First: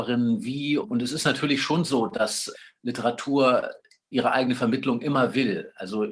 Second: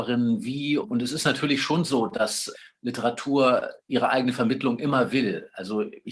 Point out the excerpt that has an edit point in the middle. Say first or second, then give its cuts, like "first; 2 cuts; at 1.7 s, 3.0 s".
second; 1 cut; at 3.8 s